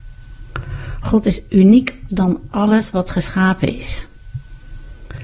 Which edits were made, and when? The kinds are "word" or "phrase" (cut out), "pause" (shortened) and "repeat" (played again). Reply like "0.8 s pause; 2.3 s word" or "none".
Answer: 2.1 s word

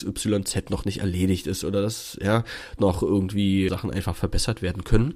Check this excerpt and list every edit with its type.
2.8 s word; 3.7 s word

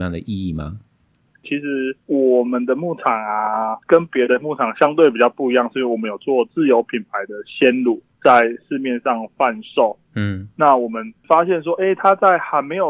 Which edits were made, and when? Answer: 2.0 s pause; 3.8 s pause

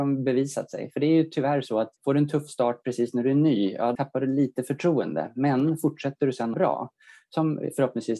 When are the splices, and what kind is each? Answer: 2.0 s pause; 4.0 s word; 6.5 s phrase

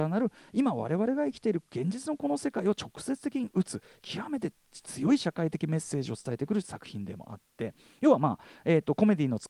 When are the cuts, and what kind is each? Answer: none

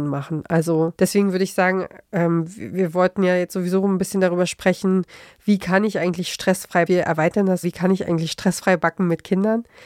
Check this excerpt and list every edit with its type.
1.0 s pause; 6.9 s phrase; 7.6 s word

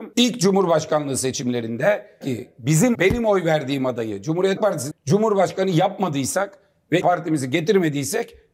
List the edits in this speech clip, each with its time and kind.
2.2 s word; 2.9 s word; 4.6 s word; 4.9 s word; 7.0 s word

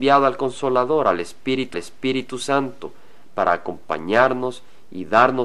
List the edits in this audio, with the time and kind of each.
1.7 s repeat

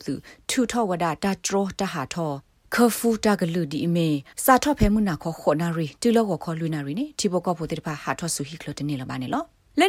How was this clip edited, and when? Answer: 4.3 s pause

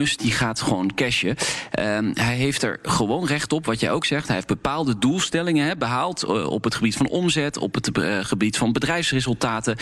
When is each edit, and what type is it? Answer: none

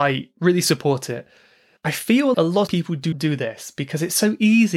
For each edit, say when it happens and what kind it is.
2.3 s word; 2.7 s word; 3.1 s word

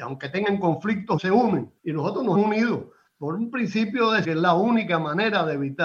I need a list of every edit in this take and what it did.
1.2 s word; 1.8 s pause; 2.3 s word; 4.2 s phrase

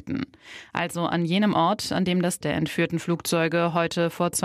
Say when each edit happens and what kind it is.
2.4 s word

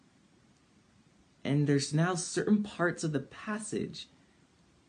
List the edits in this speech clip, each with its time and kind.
none

